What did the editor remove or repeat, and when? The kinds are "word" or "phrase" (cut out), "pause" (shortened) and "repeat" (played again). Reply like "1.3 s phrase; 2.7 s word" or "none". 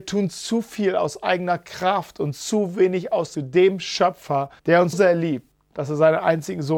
3.3 s phrase; 4.6 s pause; 4.9 s word